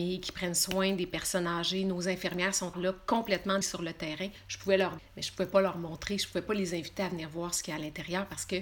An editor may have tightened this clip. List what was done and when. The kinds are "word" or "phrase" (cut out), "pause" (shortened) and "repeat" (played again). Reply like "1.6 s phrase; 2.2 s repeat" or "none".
2.7 s word; 3.6 s word; 5.0 s word